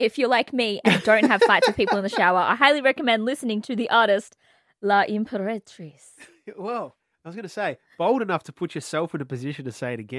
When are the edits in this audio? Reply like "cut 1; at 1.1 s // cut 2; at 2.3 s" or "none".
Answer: none